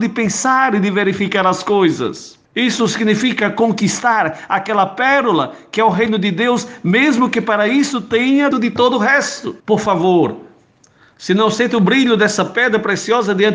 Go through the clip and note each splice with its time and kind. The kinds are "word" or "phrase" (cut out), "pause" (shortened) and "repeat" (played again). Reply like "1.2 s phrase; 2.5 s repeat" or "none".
2.5 s pause; 8.5 s word; 9.6 s pause